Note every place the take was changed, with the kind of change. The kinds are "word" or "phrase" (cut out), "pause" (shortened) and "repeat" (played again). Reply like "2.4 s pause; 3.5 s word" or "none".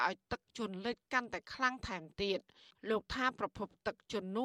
none